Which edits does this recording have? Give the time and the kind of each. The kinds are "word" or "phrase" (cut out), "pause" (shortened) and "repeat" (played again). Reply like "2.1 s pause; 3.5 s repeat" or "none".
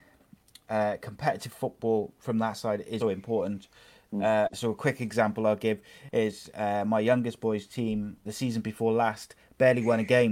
3.0 s word; 8.3 s word